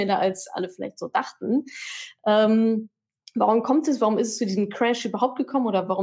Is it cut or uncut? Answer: uncut